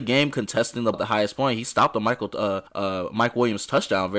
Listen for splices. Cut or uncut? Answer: cut